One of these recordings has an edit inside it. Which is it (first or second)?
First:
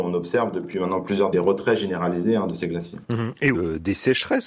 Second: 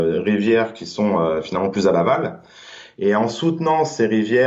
first